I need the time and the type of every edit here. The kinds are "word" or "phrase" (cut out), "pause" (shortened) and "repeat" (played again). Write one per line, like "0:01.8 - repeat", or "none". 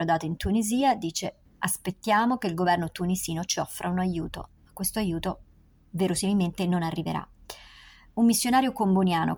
none